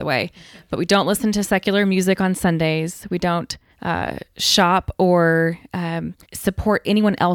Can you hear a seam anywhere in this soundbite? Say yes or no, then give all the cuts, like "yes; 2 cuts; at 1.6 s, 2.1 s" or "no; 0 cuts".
yes; 2 cuts; at 3.7 s, 6.2 s